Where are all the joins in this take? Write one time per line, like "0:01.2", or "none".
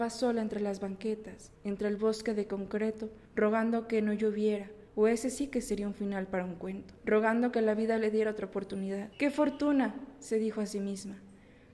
0:01.6
0:03.3
0:04.9
0:07.0
0:09.1